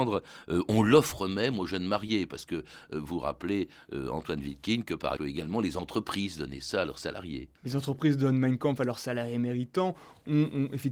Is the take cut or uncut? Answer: cut